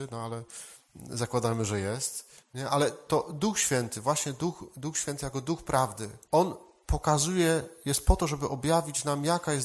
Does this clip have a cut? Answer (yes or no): yes